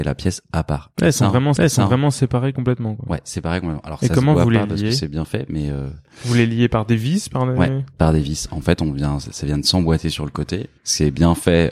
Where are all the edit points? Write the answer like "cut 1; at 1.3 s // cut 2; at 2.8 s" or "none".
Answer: cut 1; at 1.6 s // cut 2; at 10.8 s